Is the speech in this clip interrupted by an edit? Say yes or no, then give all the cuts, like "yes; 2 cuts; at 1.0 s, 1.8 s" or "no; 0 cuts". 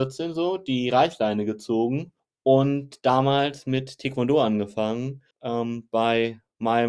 yes; 2 cuts; at 2.2 s, 5.3 s